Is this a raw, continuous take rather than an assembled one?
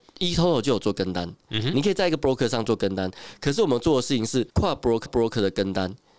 no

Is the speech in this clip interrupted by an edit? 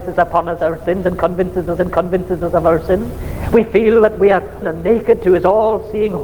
yes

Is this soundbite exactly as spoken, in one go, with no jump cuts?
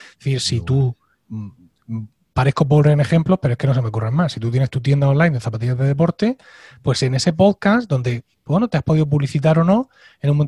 yes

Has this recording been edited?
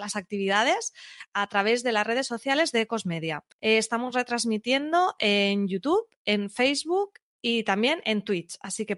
yes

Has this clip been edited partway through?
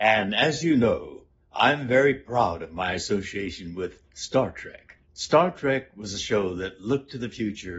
yes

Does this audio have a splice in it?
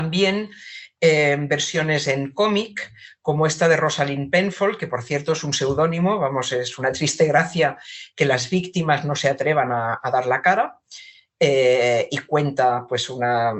no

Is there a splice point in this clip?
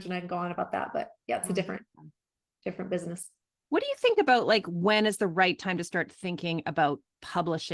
no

